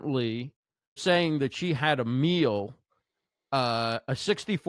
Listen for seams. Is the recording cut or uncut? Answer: cut